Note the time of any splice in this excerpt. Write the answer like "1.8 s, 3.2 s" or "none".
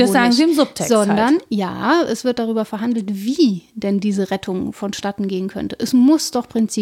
none

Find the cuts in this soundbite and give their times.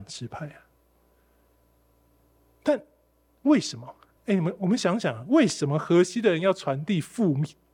4.2 s

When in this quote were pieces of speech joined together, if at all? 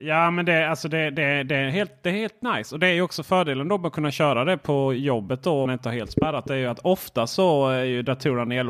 5.7 s

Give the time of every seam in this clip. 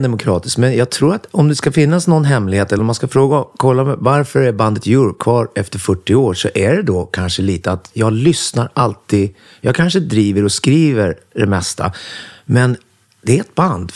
none

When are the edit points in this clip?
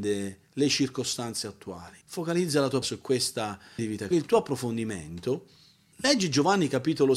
2.0 s, 2.8 s, 3.8 s, 4.1 s

